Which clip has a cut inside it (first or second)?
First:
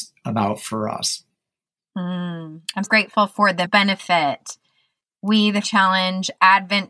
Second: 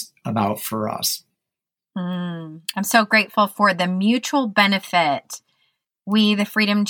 first